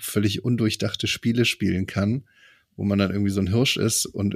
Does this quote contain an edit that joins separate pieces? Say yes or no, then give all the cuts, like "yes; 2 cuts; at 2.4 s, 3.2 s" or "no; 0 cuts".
no; 0 cuts